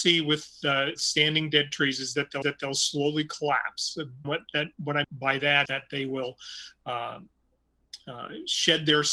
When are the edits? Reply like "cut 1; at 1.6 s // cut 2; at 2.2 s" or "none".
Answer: cut 1; at 1.0 s // cut 2; at 2.4 s // cut 3; at 4.2 s // cut 4; at 4.7 s // cut 5; at 5.0 s // cut 6; at 5.7 s